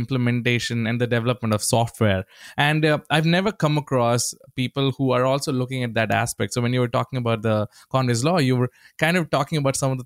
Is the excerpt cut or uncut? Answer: uncut